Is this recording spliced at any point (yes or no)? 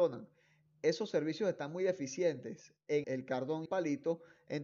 yes